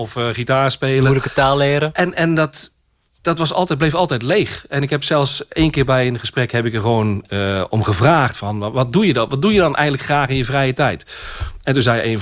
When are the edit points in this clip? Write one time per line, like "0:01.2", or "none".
none